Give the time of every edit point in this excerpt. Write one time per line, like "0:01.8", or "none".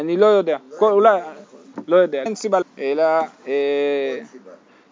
0:02.3
0:02.6